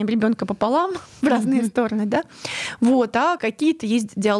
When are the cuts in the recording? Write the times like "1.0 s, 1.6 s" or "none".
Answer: 3.4 s